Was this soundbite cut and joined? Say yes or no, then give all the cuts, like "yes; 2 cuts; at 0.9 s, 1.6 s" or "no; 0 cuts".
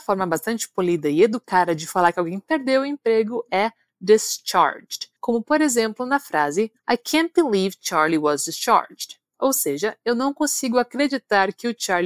yes; 2 cuts; at 5.2 s, 6.8 s